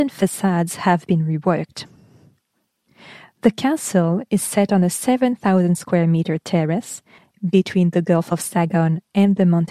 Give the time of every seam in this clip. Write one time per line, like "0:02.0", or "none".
none